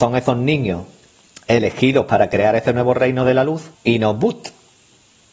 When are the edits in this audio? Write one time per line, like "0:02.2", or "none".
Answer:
0:03.7